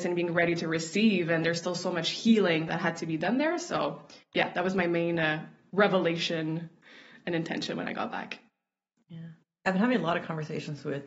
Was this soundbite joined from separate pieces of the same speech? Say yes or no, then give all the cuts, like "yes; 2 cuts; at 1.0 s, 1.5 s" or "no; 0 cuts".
no; 0 cuts